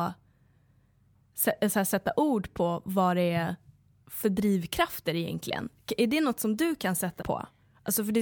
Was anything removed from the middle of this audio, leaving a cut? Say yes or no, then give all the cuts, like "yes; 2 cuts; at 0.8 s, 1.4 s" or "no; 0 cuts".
yes; 2 cuts; at 2.8 s, 7.2 s